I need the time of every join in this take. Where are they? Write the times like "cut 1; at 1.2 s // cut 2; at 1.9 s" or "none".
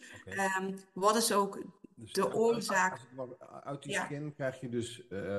cut 1; at 1.8 s